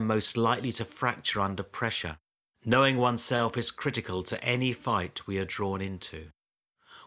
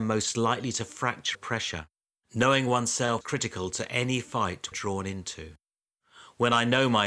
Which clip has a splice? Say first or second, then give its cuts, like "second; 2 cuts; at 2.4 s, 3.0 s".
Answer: second; 3 cuts; at 1.3 s, 3.2 s, 4.7 s